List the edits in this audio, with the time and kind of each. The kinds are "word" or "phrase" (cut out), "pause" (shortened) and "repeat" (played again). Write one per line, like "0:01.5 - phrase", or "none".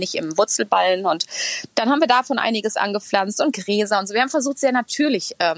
none

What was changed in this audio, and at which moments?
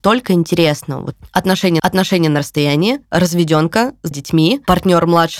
0:01.8 - repeat
0:04.1 - word

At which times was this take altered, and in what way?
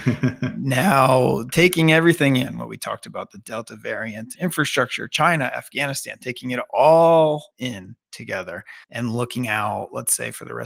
0:04.3 - word
0:07.5 - pause
0:08.8 - pause

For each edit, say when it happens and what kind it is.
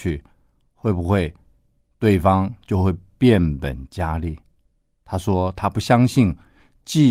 none

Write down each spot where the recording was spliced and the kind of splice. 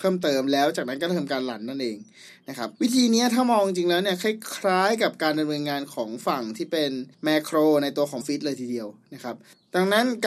0:02.7 - pause
0:07.1 - pause
0:08.2 - word

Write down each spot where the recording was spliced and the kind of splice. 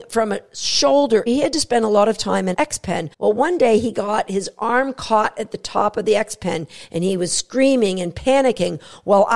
0:01.3 - word
0:02.5 - word
0:03.1 - pause

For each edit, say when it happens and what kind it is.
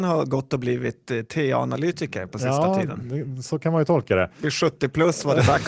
none

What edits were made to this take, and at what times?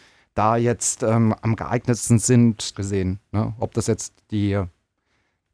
0:02.7 - word

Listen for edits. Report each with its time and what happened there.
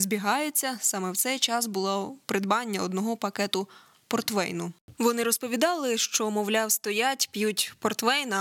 none

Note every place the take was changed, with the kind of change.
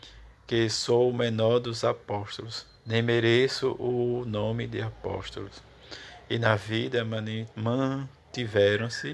0:02.8 - pause
0:07.5 - pause

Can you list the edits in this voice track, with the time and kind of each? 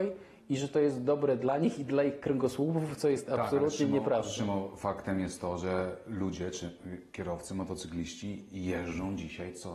none

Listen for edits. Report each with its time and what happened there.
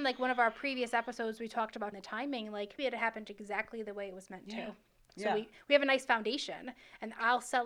0:01.9 - word
0:02.8 - word

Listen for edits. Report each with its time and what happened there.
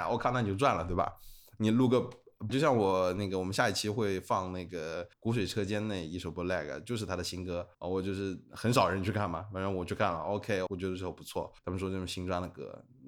0:02.5 - word
0:05.1 - pause
0:07.7 - pause
0:10.7 - word
0:11.6 - pause

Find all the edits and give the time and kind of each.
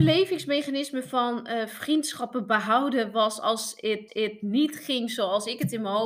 0:04.1 - repeat

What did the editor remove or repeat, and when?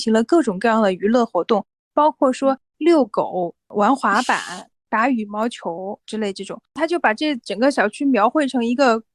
0:06.7 - pause

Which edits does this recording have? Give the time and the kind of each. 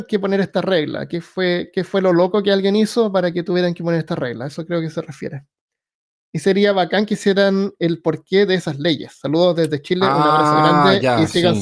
none

